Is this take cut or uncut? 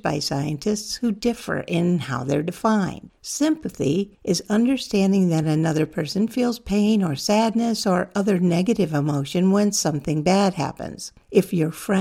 uncut